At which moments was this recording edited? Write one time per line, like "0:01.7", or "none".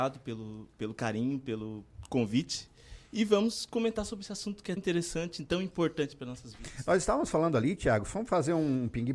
0:04.8